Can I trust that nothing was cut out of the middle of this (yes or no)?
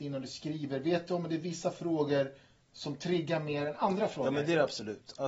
yes